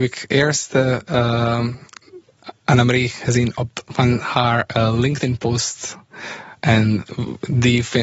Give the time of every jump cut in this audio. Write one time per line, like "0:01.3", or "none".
0:03.9